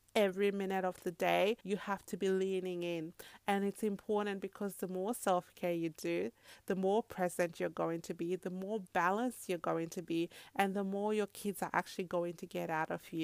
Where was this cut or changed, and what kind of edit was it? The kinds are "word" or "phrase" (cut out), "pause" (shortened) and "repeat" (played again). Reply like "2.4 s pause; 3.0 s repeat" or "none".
1.6 s pause